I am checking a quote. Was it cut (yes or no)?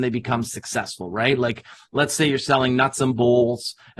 no